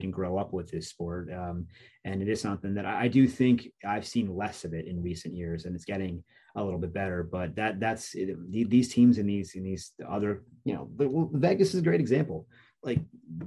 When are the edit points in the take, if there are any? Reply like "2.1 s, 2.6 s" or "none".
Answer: none

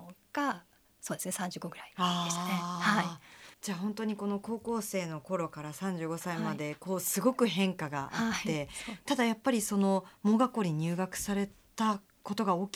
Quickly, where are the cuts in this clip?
3.5 s

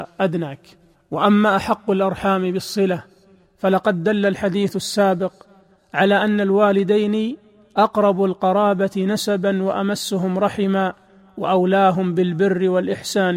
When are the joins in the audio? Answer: none

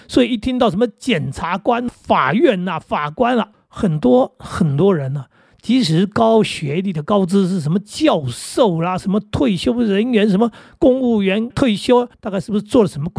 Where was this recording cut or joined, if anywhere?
1.9 s, 3.5 s, 11.5 s, 12.1 s

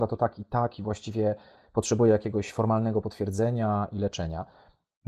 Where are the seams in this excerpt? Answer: none

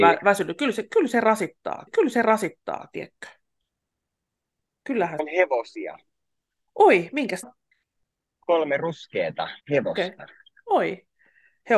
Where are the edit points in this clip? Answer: 1.9 s, 5.2 s, 7.4 s, 9.6 s

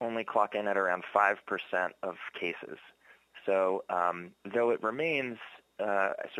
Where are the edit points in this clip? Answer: none

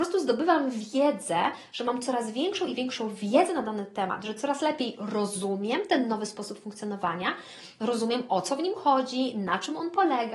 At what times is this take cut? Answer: none

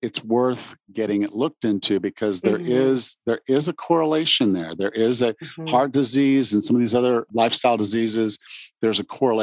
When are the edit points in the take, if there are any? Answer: 7.3 s

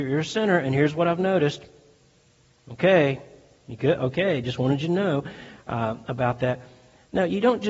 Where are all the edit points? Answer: none

